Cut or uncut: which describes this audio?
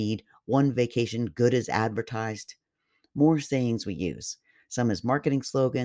uncut